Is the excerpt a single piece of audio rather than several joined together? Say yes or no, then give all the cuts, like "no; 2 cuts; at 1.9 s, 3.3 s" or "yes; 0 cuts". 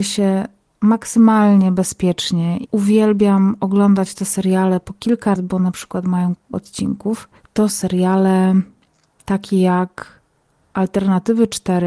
no; 4 cuts; at 2.7 s, 5.4 s, 6.5 s, 7.7 s